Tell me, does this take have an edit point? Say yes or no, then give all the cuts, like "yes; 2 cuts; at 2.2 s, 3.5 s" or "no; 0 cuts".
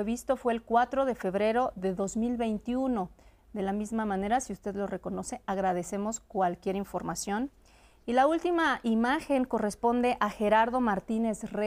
no; 0 cuts